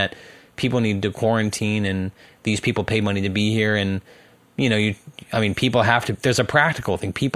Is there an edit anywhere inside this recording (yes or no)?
no